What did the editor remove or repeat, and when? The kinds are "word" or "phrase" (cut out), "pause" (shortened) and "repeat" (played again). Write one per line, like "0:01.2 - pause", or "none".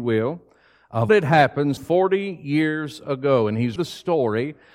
0:01.1 - word
0:01.8 - word
0:03.8 - word